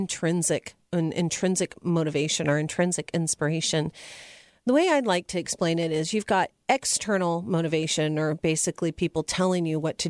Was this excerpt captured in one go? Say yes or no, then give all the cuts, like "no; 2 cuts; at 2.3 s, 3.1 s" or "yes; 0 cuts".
yes; 0 cuts